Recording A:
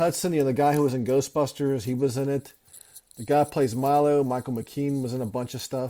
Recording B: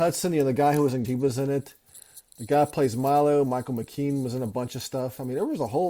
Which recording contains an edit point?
B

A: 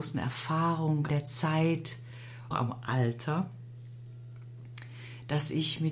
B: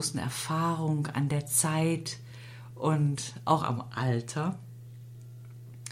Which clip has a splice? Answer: A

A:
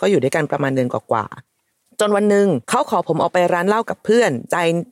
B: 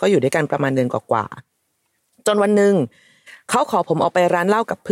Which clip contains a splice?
A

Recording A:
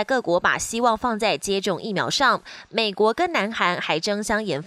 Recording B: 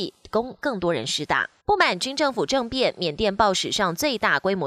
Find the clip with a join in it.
B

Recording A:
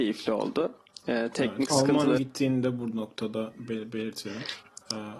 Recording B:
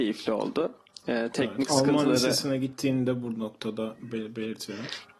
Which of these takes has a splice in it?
A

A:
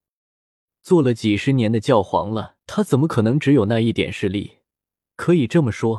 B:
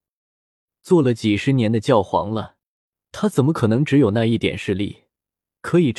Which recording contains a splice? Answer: A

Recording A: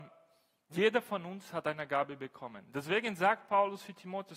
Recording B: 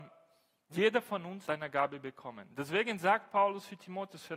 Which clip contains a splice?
B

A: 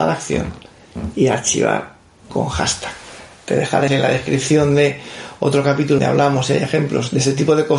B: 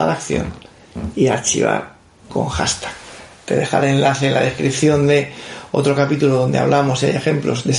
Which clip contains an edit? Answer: A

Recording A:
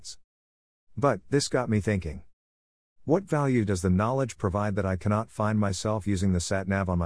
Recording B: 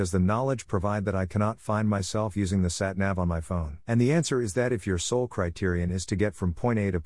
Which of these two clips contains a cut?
B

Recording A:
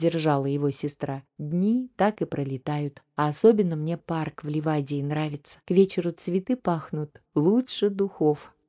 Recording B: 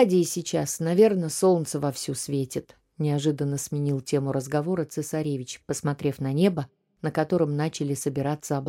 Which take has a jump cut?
A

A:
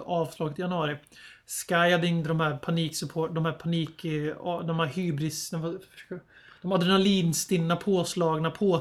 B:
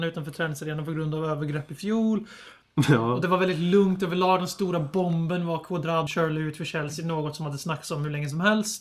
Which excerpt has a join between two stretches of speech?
B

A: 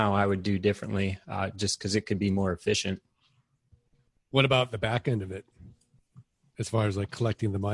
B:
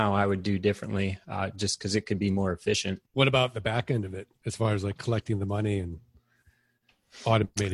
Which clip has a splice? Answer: B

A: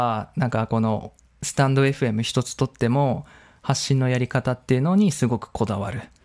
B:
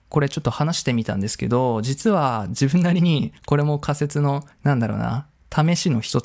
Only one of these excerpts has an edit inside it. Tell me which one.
B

